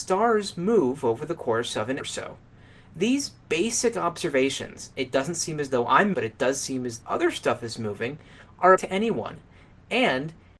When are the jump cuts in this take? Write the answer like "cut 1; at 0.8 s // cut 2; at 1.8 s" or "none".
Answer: cut 1; at 2.0 s // cut 2; at 4.9 s // cut 3; at 6.1 s // cut 4; at 7.0 s // cut 5; at 8.8 s